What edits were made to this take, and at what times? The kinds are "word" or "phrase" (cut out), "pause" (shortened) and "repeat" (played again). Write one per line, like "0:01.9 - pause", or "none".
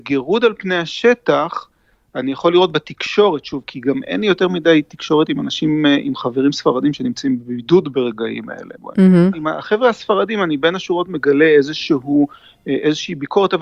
none